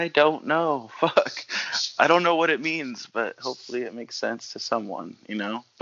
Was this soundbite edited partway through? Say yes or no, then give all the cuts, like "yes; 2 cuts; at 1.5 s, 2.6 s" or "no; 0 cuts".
no; 0 cuts